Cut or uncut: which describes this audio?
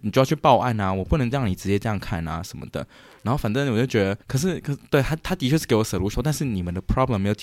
cut